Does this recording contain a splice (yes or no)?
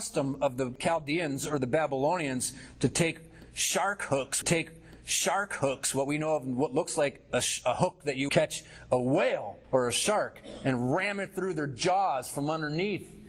yes